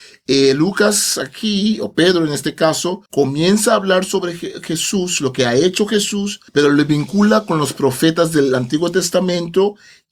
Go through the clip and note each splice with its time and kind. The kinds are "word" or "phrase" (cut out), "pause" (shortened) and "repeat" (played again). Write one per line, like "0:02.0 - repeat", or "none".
0:03.1 - pause
0:06.5 - pause